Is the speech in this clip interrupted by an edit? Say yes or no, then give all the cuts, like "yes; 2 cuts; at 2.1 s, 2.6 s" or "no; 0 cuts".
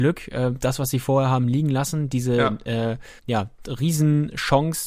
yes; 1 cut; at 3.2 s